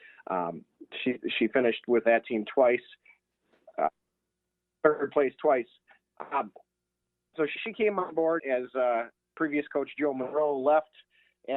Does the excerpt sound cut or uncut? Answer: cut